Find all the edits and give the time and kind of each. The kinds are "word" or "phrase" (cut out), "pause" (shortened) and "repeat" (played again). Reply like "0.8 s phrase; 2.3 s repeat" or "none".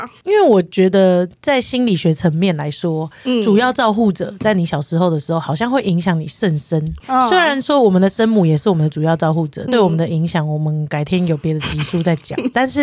9.7 s word